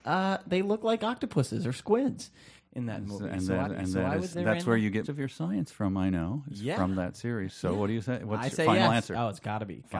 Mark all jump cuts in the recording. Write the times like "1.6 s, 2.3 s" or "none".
3.6 s, 4.3 s, 5.0 s